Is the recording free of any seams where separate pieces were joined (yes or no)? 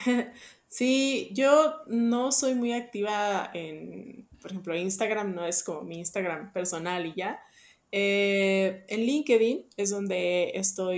yes